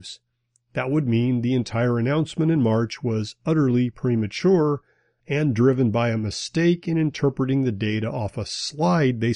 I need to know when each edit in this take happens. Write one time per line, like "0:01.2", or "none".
none